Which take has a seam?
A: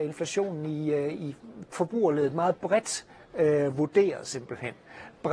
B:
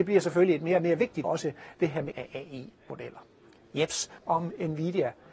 B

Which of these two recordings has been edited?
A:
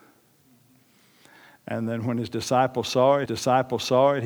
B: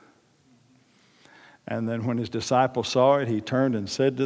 A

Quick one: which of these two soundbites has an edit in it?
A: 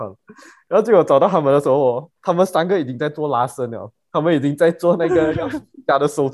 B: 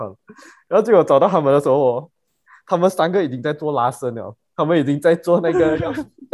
A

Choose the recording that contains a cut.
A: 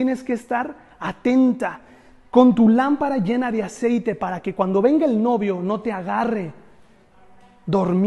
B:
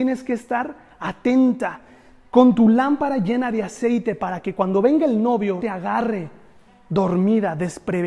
B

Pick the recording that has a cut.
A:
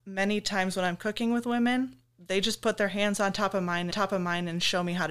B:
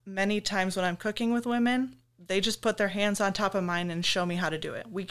A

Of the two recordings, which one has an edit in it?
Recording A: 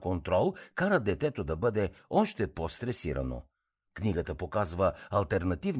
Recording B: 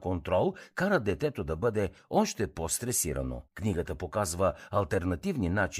B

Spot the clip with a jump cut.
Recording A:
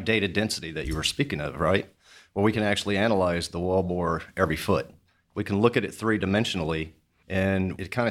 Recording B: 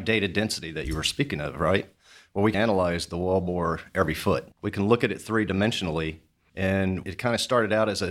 B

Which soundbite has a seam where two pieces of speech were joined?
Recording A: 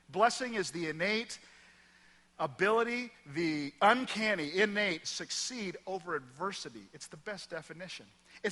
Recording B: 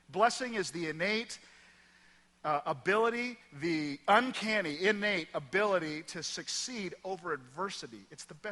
A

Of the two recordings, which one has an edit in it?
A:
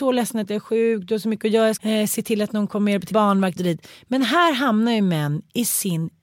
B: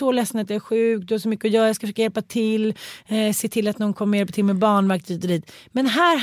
A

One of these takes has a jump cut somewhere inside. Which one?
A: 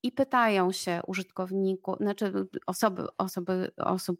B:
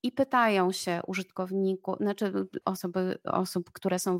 B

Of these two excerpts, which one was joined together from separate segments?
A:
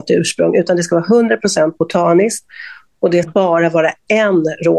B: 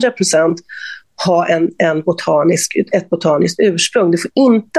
A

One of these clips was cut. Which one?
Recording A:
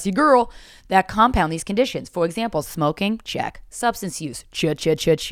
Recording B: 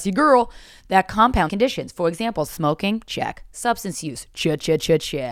B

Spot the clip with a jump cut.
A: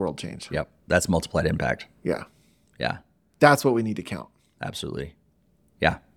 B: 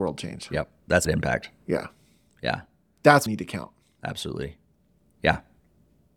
B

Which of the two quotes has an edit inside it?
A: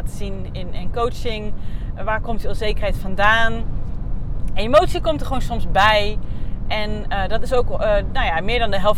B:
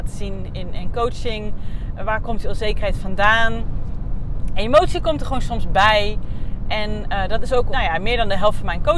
B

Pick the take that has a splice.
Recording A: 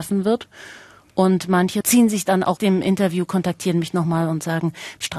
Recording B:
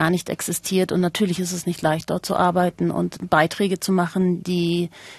A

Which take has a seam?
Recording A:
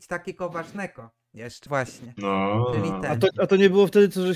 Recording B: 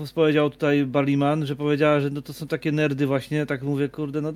A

